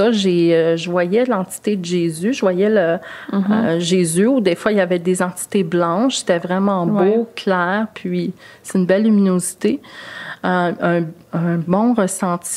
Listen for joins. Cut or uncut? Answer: uncut